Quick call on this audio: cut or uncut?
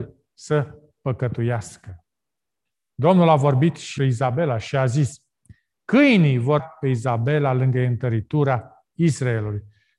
cut